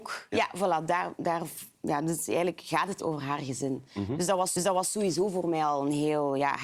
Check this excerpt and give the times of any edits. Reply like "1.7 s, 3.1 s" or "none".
3.0 s, 4.6 s